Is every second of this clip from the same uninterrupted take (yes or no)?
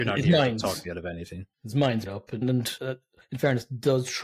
no